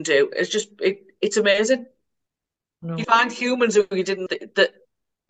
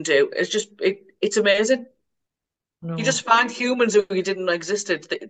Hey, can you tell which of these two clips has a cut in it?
first; 2 cuts; at 3.0 s, 4.3 s

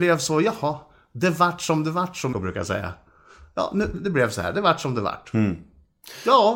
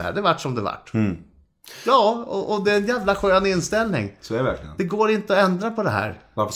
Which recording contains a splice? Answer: first; 2 cuts; at 2.3 s, 3.9 s

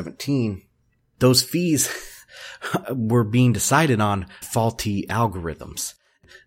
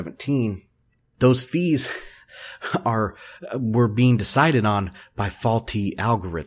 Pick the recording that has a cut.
first; 2 cuts; at 2.8 s, 4.4 s

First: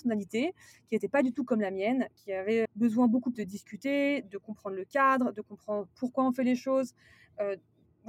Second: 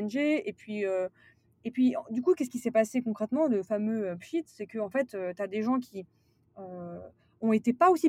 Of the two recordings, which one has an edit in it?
first; 2 cuts; at 2.6 s, 3.3 s

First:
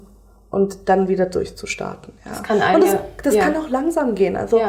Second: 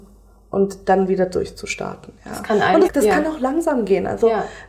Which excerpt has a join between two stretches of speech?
second; 1 cut; at 2.8 s

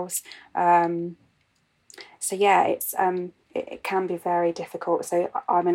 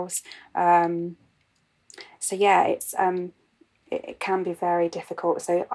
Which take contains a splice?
first; 1 cut; at 3.4 s

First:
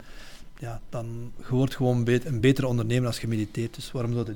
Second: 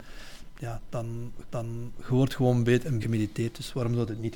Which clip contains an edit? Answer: second; 2 cuts; at 1.4 s, 3.0 s

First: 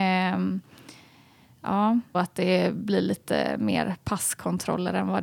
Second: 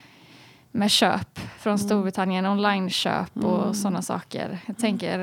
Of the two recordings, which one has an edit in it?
first; 1 cut; at 2.1 s

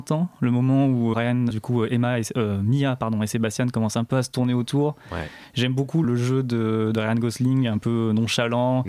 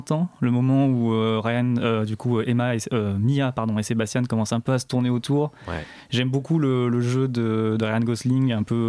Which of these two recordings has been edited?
first; 3 cuts; at 1.1 s, 1.5 s, 6.0 s

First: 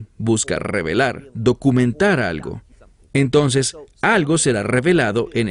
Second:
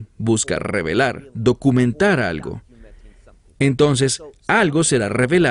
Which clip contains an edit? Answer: first; 1 cut; at 2.7 s

